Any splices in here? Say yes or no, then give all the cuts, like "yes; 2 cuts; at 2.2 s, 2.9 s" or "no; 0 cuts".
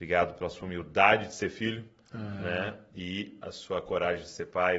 no; 0 cuts